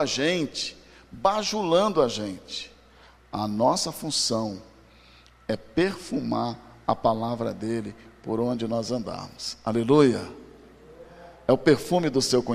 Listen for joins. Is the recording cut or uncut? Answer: uncut